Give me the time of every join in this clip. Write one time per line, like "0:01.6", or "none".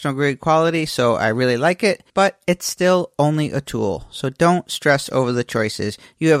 0:02.1